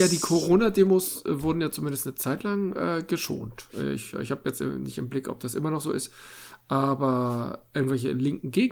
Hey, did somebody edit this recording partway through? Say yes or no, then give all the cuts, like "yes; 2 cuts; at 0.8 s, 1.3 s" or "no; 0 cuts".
no; 0 cuts